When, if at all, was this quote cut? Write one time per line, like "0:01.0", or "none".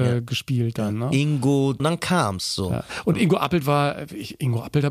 0:01.8